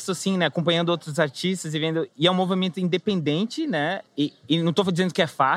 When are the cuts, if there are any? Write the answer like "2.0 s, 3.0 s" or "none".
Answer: 4.1 s